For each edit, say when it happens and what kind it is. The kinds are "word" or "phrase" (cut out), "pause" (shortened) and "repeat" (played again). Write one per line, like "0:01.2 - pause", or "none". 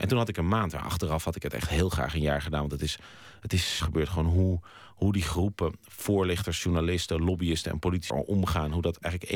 0:03.8 - phrase
0:08.1 - phrase

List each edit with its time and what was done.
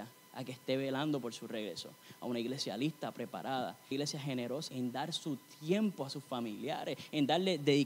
0:03.9 - word
0:04.7 - word

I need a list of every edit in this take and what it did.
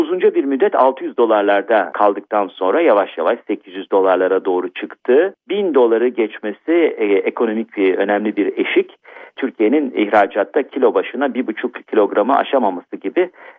none

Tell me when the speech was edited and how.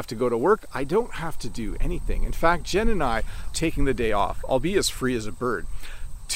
0:03.5 - word

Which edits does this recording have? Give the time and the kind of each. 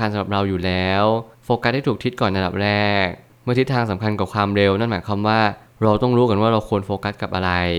none

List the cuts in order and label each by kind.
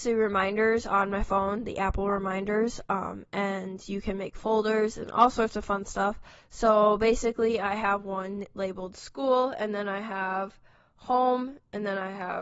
none

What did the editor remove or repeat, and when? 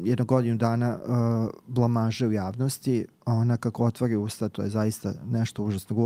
0:03.2 - pause

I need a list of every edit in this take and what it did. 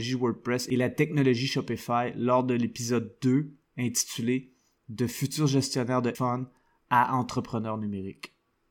0:06.1 - word

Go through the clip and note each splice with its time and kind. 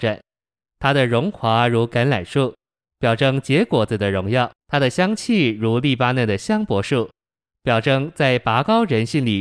0:04.6 - pause

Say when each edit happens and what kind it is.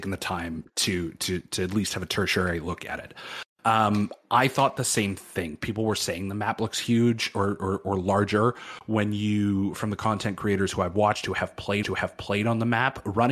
0:11.8 - repeat

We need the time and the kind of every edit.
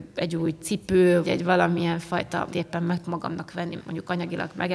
0:01.2 - word
0:02.5 - phrase
0:03.0 - word
0:03.8 - word

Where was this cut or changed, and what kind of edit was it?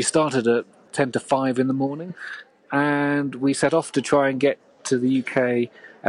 none

